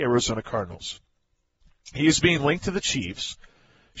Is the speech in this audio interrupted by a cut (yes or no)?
no